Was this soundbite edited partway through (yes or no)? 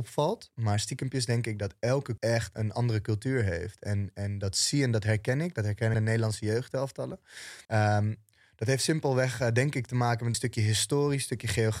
yes